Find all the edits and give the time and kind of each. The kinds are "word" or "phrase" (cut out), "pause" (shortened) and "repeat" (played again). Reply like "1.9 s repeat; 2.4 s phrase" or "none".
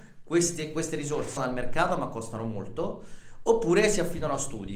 1.4 s phrase